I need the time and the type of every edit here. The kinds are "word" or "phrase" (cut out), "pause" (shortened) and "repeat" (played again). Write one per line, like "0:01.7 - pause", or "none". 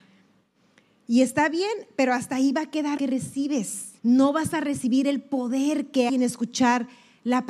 0:03.0 - word
0:04.0 - pause
0:06.1 - word